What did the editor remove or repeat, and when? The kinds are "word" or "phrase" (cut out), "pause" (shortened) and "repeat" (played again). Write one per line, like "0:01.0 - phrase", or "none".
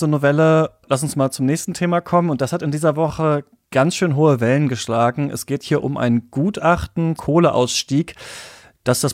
0:07.2 - word